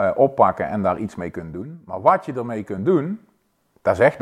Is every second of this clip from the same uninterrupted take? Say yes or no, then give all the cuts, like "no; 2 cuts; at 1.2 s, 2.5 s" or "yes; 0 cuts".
yes; 0 cuts